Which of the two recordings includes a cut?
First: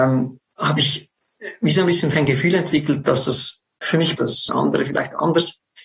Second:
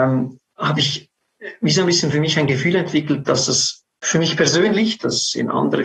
first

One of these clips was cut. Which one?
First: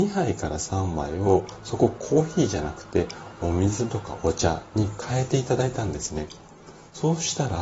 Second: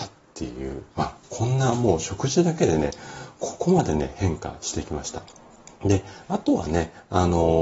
second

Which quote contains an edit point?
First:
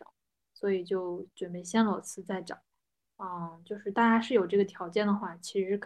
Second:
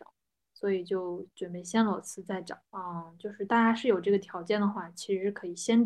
second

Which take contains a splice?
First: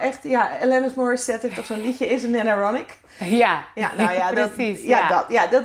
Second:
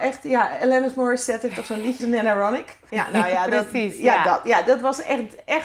second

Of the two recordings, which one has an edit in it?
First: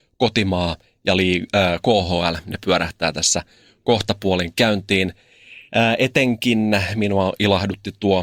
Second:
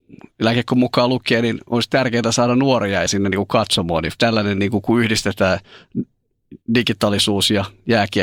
second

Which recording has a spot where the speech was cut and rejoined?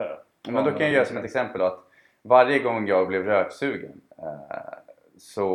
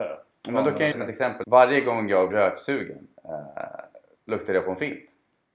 second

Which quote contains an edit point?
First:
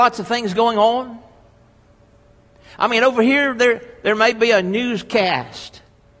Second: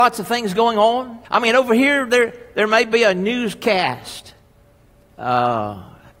second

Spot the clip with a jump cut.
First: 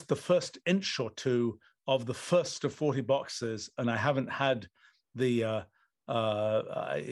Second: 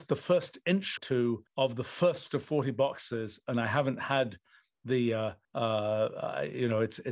second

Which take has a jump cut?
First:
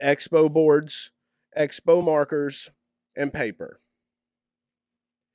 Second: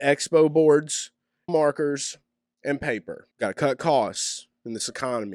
second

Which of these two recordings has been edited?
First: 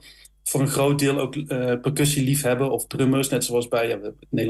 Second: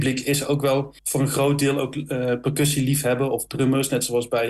second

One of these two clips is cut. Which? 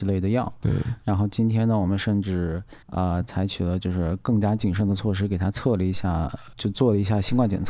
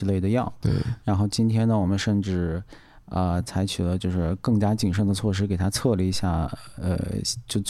first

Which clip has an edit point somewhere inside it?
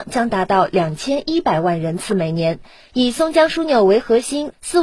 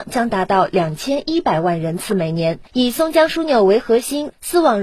second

